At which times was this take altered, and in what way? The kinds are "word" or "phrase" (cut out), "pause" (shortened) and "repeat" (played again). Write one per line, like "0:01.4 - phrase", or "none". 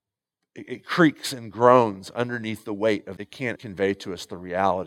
0:03.2 - phrase
0:03.6 - word

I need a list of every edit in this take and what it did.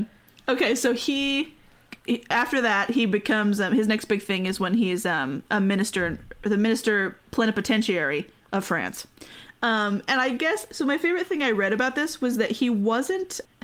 0:02.0 - pause
0:07.3 - pause

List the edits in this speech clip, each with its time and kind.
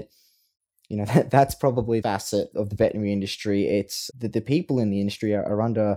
0:02.0 - phrase
0:02.5 - word
0:04.1 - word

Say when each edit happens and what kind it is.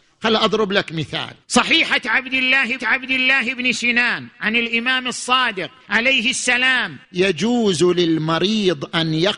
0:01.4 - pause
0:02.8 - repeat
0:05.8 - pause
0:07.0 - pause

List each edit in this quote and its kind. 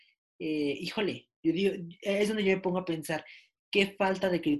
none

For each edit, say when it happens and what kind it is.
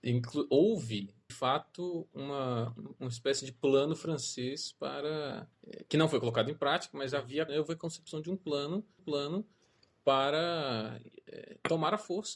0:01.3 - word
0:05.5 - pause
0:07.5 - phrase
0:09.0 - repeat

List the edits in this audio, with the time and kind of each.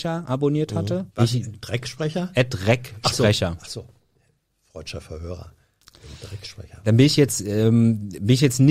0:01.1 - pause

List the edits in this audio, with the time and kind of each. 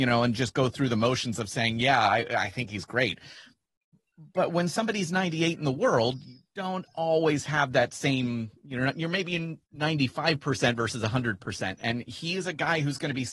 0:09.6 - pause

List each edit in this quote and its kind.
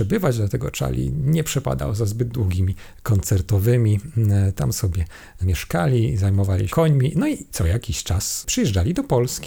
0:02.9 - word
0:06.7 - phrase

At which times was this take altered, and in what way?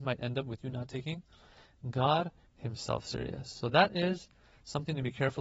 none

